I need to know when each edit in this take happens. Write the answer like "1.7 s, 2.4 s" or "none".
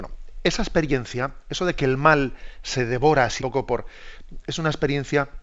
3.4 s